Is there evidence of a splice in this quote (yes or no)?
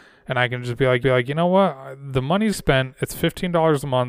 yes